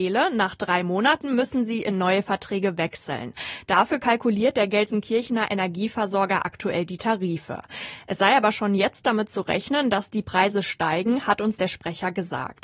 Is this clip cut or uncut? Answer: uncut